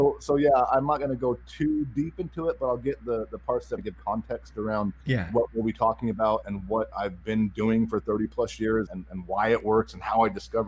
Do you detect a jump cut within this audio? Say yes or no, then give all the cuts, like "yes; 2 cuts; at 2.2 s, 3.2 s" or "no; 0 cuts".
yes; 4 cuts; at 3.8 s, 5.0 s, 6.4 s, 8.9 s